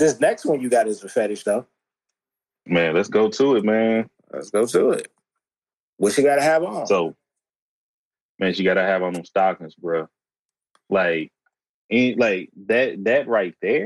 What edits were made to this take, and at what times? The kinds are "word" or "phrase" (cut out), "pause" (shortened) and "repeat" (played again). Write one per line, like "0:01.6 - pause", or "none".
none